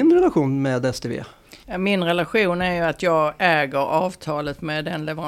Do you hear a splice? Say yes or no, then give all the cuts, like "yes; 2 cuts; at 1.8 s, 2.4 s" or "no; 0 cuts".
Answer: yes; 1 cut; at 1.6 s